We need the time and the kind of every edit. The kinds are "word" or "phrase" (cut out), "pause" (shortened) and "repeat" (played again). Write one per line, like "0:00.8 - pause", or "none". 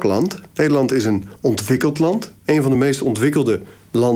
none